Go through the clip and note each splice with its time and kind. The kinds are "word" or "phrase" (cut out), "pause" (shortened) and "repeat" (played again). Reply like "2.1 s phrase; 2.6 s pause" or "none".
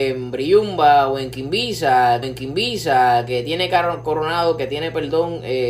2.2 s repeat